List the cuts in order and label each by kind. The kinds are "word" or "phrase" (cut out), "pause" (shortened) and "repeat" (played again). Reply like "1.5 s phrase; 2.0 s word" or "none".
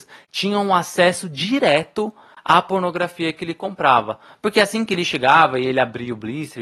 none